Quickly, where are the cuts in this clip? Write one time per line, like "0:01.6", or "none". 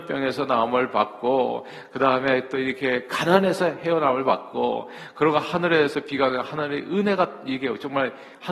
none